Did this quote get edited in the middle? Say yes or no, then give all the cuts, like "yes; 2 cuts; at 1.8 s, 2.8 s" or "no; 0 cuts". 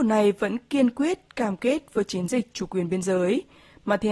no; 0 cuts